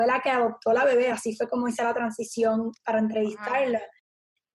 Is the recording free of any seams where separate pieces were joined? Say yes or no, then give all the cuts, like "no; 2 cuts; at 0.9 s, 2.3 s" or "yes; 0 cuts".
yes; 0 cuts